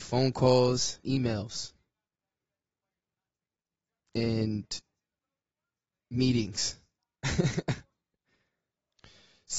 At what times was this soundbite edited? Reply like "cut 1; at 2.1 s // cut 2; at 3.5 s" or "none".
cut 1; at 1.0 s